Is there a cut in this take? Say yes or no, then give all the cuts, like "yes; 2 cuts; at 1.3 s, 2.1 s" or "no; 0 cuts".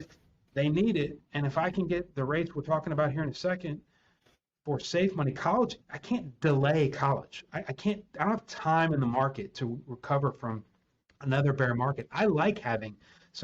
yes; 2 cuts; at 1.2 s, 5.8 s